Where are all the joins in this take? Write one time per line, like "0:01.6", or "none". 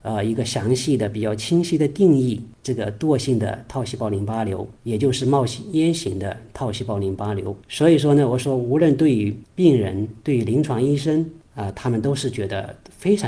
0:04.8
0:07.6